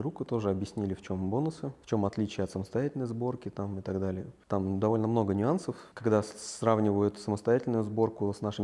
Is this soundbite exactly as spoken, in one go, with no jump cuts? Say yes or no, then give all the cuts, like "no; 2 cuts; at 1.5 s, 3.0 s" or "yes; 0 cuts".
no; 1 cut; at 1.8 s